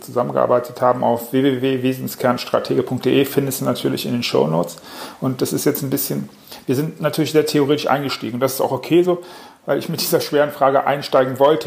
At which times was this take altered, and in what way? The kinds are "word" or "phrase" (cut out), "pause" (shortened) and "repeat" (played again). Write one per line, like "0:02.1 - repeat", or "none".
none